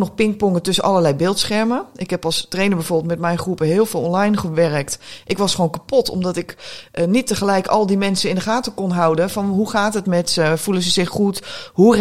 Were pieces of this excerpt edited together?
no; 0 cuts

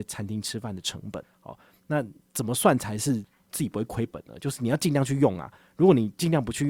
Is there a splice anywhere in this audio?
no; 0 cuts

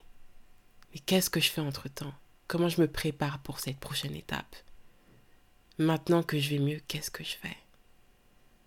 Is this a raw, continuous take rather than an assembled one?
yes; 0 cuts

